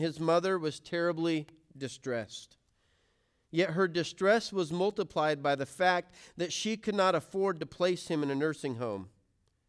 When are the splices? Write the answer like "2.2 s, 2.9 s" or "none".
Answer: none